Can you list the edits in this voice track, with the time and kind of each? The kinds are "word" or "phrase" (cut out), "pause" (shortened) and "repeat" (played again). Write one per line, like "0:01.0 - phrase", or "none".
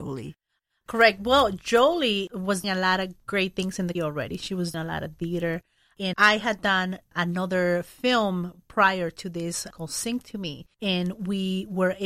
0:02.6 - word
0:04.0 - word
0:04.7 - word
0:06.1 - word
0:10.7 - pause